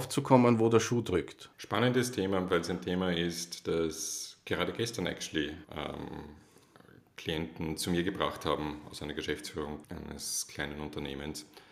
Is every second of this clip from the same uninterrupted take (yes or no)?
no